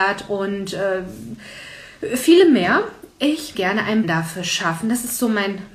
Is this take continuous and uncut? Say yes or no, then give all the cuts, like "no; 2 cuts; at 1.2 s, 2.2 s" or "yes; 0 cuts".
no; 2 cuts; at 3.5 s, 4.0 s